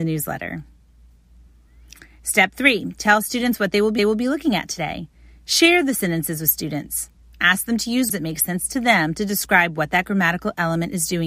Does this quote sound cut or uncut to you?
cut